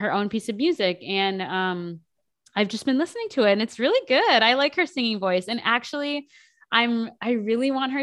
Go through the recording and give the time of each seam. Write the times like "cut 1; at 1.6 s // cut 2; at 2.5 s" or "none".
none